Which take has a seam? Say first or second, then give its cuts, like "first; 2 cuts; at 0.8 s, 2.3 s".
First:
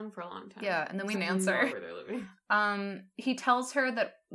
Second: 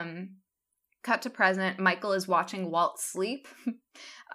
first; 2 cuts; at 1.1 s, 1.7 s